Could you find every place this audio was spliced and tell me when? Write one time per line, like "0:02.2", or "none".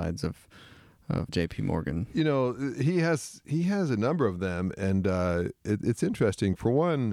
0:01.3